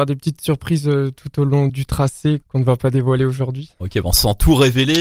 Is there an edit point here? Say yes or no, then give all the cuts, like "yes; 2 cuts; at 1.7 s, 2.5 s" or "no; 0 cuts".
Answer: yes; 2 cuts; at 1.7 s, 2.4 s